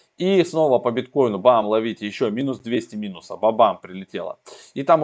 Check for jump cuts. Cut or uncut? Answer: uncut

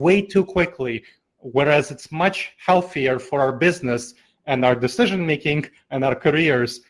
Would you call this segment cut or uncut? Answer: uncut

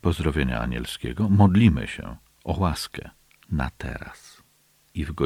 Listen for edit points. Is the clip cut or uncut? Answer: uncut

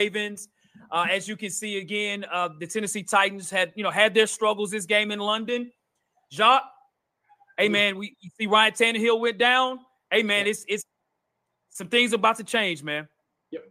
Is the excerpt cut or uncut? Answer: uncut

